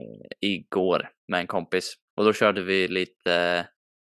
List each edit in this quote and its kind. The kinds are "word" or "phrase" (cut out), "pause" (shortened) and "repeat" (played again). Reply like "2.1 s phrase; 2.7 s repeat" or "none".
1.2 s pause; 2.1 s pause